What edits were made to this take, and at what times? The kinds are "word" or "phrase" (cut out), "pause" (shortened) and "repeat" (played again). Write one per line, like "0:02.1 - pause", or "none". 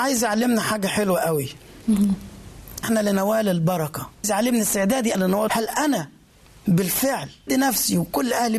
0:02.8 - word
0:04.2 - word
0:05.1 - word
0:05.5 - word
0:07.5 - word